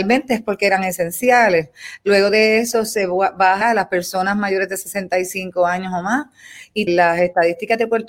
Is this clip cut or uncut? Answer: cut